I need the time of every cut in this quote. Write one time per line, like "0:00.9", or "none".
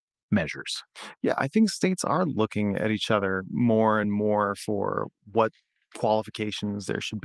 none

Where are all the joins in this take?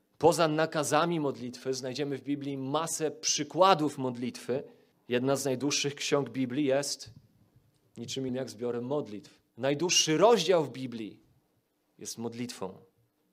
0:04.9
0:08.3
0:09.5

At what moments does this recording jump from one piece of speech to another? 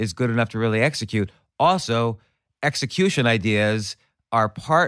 none

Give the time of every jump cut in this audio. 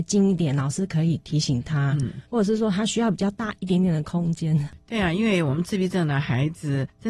0:02.3

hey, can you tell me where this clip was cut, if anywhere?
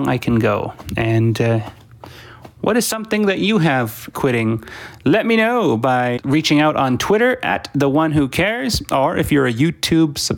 0:04.1
0:06.2

